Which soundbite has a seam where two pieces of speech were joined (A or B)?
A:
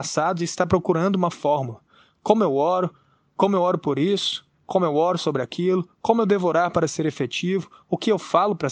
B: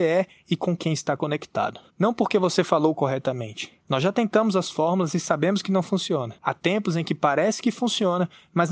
B